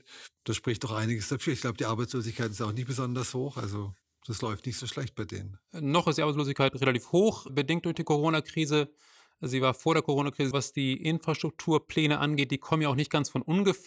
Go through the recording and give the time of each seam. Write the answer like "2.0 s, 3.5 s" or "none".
4.0 s, 7.5 s, 10.5 s